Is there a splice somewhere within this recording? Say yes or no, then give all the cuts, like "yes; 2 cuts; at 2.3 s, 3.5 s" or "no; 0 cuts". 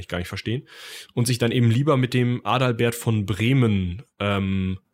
no; 0 cuts